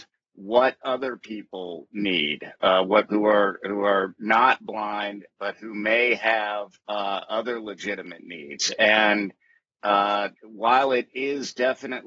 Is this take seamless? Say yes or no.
no